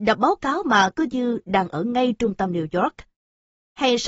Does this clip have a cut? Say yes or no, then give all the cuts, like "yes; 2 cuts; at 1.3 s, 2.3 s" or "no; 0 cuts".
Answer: no; 0 cuts